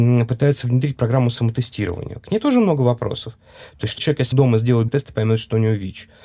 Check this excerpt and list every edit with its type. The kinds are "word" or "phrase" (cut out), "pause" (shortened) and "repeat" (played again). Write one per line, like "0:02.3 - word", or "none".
0:04.0 - word
0:04.3 - word
0:04.9 - word